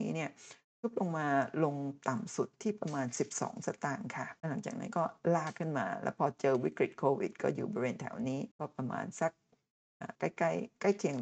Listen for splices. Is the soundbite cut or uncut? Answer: cut